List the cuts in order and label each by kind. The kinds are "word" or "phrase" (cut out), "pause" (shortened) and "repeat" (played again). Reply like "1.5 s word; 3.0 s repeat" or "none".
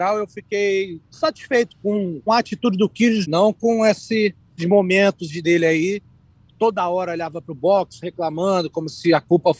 1.1 s pause; 2.3 s word; 3.2 s word; 4.6 s word; 5.4 s word

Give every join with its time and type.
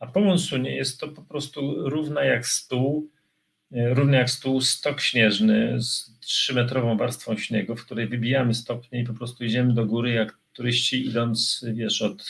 none

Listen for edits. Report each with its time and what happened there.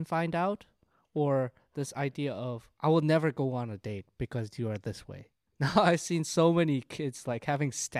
none

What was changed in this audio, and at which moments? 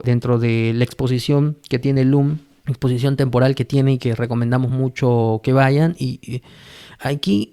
none

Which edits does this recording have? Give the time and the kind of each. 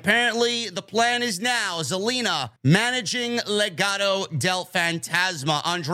2.6 s pause

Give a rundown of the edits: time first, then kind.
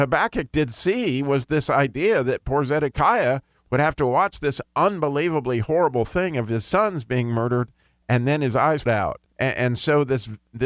8.9 s word; 9.3 s pause

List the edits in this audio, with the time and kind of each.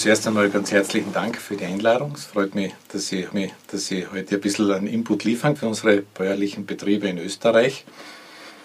1.4 s word; 3.3 s repeat; 5.6 s word

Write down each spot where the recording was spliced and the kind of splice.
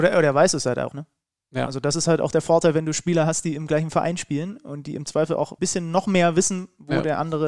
0.9 s word; 5.6 s word

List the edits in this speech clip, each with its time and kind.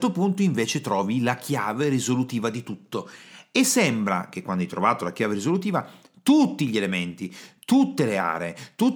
none

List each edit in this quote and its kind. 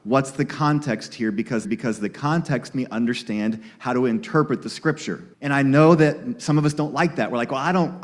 1.6 s repeat; 2.7 s word; 5.3 s pause

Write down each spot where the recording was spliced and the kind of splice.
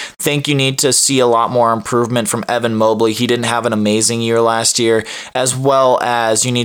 none

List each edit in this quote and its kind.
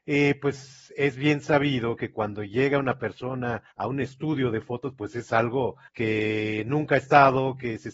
3.7 s pause; 5.9 s pause

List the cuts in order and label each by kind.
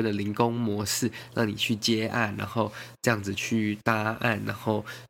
none

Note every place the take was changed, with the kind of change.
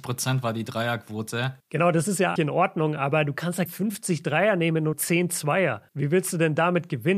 1.6 s pause; 2.4 s word; 3.7 s word; 4.9 s word; 5.9 s pause

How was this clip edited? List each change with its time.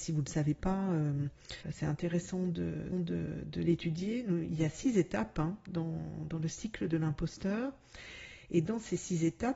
1.6 s pause; 2.9 s repeat

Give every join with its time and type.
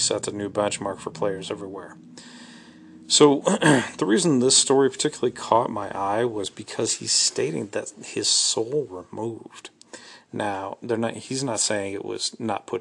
8.9 s word

